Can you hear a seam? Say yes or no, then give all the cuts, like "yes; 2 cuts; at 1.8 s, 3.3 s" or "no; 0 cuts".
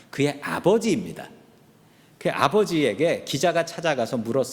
no; 0 cuts